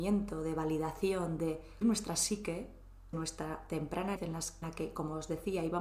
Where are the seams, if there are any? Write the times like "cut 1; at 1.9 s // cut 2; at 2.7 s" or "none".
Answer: cut 1; at 1.8 s // cut 2; at 3.1 s // cut 3; at 4.2 s // cut 4; at 4.6 s